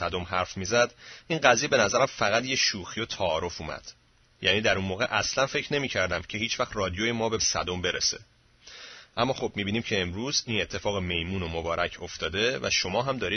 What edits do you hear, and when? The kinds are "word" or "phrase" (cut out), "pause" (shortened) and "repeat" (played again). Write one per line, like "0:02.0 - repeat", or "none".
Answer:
0:07.4 - word